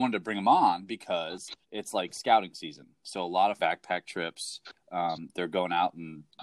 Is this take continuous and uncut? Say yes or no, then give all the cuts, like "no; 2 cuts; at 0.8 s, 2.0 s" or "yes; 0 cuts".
no; 2 cuts; at 1.6 s, 3.6 s